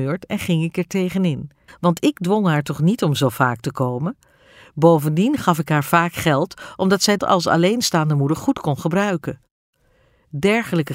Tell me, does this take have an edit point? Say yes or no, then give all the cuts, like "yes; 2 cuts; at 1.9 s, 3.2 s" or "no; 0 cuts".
yes; 2 cuts; at 1.7 s, 7.2 s